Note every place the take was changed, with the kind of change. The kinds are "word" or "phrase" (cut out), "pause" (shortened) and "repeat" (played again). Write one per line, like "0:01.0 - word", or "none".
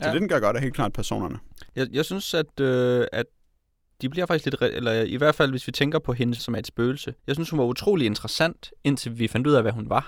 0:06.4 - word
0:07.2 - pause